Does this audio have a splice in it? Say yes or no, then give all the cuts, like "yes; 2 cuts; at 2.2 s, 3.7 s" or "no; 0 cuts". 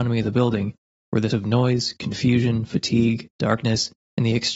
yes; 1 cut; at 1.3 s